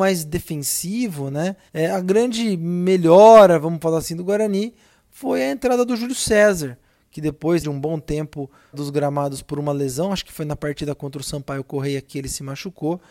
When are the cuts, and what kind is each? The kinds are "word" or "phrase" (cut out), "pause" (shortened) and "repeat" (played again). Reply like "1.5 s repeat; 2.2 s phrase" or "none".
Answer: 1.7 s pause; 7.6 s word; 8.7 s word